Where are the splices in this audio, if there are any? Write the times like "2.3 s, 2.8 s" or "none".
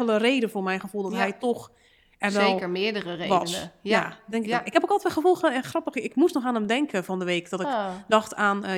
none